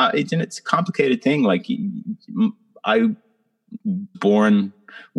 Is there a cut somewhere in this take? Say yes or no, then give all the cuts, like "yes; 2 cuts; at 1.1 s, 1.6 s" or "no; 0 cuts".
yes; 1 cut; at 4.1 s